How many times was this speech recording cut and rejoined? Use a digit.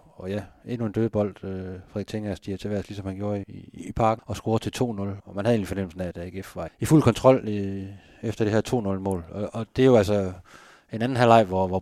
4